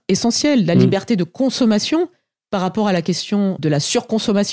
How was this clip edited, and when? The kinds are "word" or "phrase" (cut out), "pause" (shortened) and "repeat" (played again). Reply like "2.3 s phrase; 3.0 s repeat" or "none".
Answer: 3.6 s word